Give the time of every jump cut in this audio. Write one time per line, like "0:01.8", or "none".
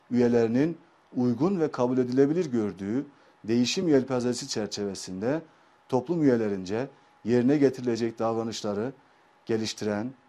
none